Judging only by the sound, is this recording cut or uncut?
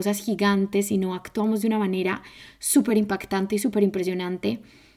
uncut